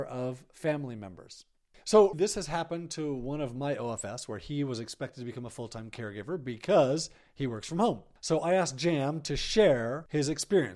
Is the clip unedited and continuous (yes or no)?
no